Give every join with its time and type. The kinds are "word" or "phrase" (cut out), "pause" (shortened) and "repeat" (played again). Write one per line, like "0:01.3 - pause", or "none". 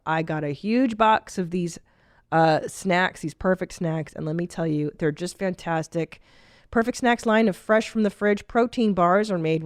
none